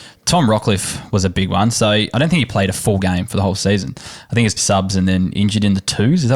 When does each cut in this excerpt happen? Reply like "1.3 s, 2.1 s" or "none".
4.6 s